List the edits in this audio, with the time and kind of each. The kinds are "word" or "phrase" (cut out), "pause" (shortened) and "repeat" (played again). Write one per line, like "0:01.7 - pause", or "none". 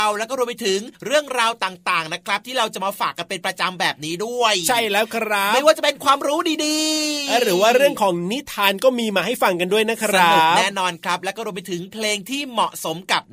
0:00.9 - pause